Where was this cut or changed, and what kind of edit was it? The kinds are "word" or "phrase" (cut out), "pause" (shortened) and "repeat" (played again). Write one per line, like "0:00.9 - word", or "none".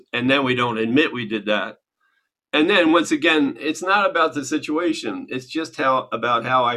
none

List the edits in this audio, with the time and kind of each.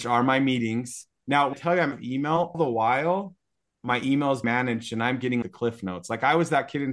0:01.5 - word
0:01.9 - word
0:02.5 - word
0:04.4 - word
0:05.4 - word

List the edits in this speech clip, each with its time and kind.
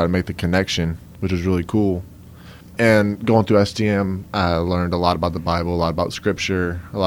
0:02.6 - pause
0:04.3 - pause

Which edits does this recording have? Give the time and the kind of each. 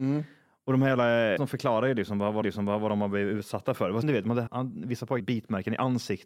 0:01.4 - word
0:02.4 - repeat
0:04.0 - phrase
0:04.5 - word
0:05.2 - word

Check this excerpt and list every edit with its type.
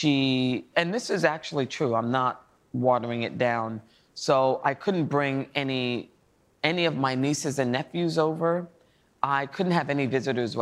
none

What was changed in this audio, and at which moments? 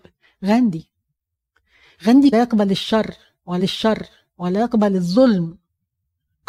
0:02.3 - phrase
0:03.6 - repeat

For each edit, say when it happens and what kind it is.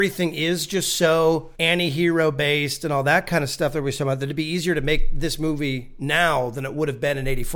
0:01.5 - pause

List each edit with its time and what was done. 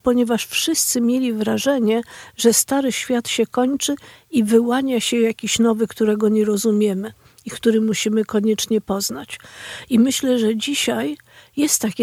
none

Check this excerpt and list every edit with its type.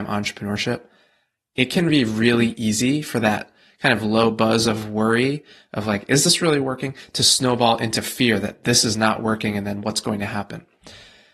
none

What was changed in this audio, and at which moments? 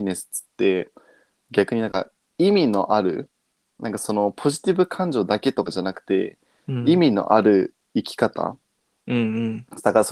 none

